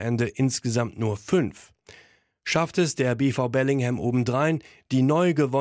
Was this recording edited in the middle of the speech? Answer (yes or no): no